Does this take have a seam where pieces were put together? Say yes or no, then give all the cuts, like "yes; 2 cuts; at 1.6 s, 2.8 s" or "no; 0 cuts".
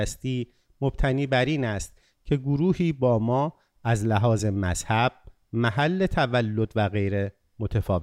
no; 0 cuts